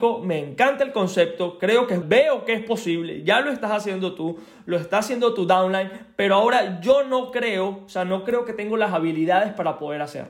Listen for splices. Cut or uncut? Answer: cut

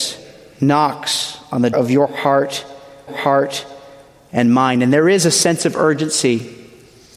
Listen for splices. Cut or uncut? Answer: cut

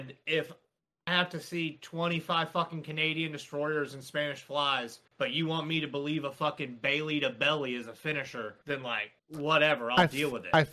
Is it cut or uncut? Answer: cut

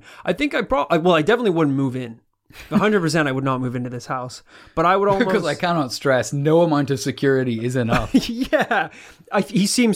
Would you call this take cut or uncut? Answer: uncut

